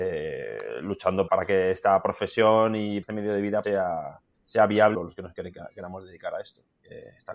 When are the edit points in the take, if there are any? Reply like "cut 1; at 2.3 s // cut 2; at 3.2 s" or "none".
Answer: cut 1; at 1.3 s // cut 2; at 3.0 s // cut 3; at 3.6 s // cut 4; at 4.3 s // cut 5; at 4.9 s